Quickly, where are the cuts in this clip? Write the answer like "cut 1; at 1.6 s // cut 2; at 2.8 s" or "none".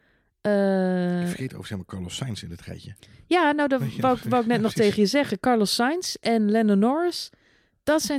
none

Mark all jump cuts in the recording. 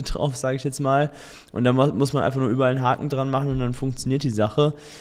none

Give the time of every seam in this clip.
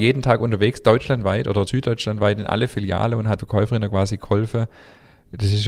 cut 1; at 1.7 s // cut 2; at 3.4 s

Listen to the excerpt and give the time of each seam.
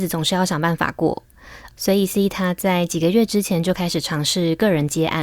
cut 1; at 2.1 s

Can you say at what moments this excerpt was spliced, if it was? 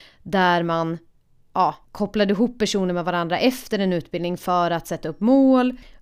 cut 1; at 1.8 s

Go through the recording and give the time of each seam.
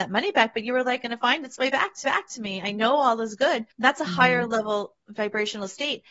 cut 1; at 1.0 s // cut 2; at 2.0 s // cut 3; at 3.7 s

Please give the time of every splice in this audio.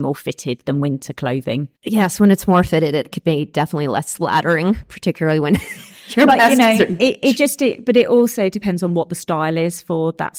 cut 1; at 1.7 s

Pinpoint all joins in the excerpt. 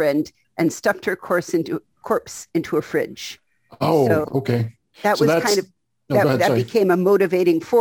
none

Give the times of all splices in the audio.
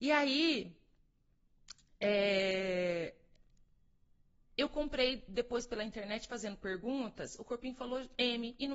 none

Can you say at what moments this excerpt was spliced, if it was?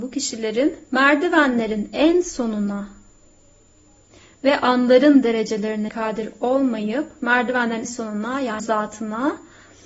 cut 1; at 5.9 s // cut 2; at 7.8 s // cut 3; at 8.6 s

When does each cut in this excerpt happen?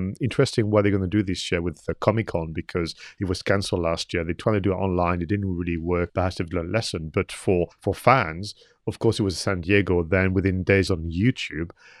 cut 1; at 6.1 s // cut 2; at 7.7 s // cut 3; at 10.9 s

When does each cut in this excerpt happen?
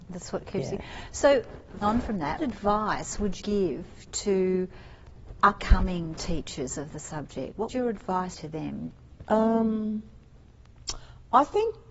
cut 1; at 1.8 s // cut 2; at 2.4 s // cut 3; at 3.4 s // cut 4; at 5.6 s // cut 5; at 7.7 s // cut 6; at 8.3 s

